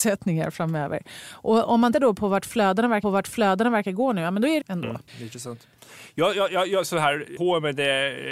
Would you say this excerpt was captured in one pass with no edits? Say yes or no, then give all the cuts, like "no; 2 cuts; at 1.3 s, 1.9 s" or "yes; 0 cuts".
no; 5 cuts; at 1.9 s, 3.0 s, 4.6 s, 5.1 s, 7.4 s